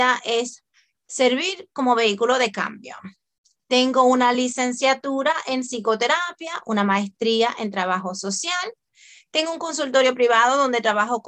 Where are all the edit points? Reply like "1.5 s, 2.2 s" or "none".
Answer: none